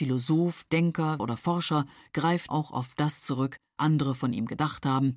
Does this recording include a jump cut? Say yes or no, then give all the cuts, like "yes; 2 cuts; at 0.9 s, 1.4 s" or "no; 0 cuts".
yes; 3 cuts; at 1.2 s, 2.5 s, 3.8 s